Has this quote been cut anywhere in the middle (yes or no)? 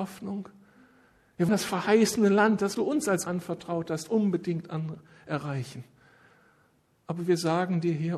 yes